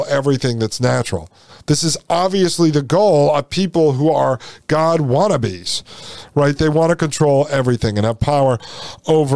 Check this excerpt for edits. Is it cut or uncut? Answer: uncut